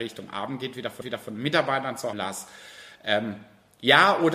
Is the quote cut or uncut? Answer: cut